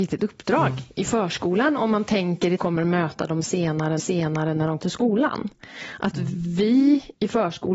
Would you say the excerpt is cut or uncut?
cut